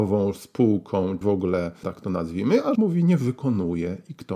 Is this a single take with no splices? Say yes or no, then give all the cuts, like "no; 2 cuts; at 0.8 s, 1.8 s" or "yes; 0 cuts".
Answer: no; 3 cuts; at 1.2 s, 1.8 s, 2.8 s